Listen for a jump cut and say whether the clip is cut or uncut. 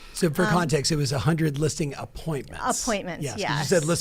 uncut